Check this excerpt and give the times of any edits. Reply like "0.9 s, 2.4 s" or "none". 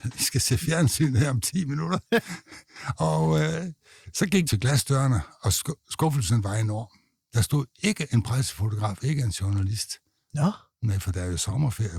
2.1 s, 4.5 s